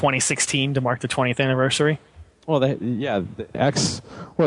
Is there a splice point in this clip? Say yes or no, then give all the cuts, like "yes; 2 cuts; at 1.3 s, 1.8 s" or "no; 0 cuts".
yes; 1 cut; at 3.5 s